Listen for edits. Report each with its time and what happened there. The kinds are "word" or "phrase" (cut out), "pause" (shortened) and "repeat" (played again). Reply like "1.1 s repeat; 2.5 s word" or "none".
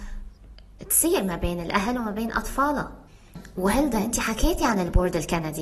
none